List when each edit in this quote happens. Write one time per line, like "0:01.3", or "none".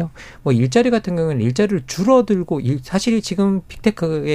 none